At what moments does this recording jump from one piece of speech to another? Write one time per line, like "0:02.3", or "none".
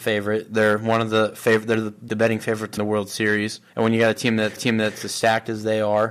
0:02.1
0:02.8
0:03.7
0:04.6